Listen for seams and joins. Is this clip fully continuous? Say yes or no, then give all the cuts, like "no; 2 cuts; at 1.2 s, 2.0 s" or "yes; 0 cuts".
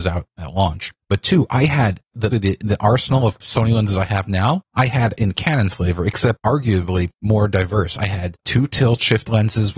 no; 1 cut; at 2.3 s